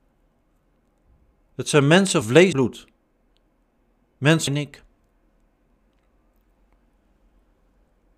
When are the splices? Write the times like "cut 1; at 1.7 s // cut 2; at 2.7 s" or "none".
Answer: cut 1; at 2.2 s // cut 2; at 2.5 s // cut 3; at 4.5 s